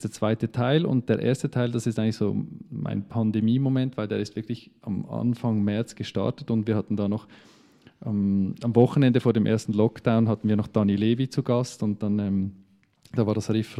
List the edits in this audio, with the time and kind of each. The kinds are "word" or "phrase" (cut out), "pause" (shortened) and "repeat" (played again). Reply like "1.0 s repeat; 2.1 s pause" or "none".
none